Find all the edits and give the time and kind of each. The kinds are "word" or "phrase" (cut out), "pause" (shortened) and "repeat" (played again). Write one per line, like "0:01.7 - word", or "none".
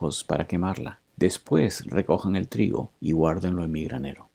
0:01.1 - pause
0:03.0 - pause